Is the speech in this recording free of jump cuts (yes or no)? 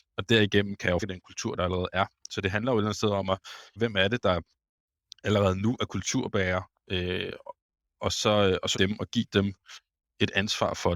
no